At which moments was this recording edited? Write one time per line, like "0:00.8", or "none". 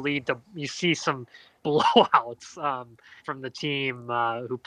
0:01.6
0:03.2